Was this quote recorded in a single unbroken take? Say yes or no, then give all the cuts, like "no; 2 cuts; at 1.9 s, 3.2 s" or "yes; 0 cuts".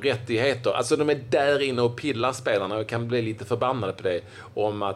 yes; 0 cuts